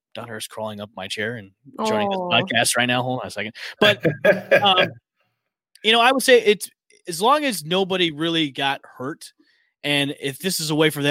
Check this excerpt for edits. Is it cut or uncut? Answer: uncut